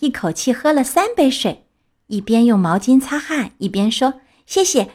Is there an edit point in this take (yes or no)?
no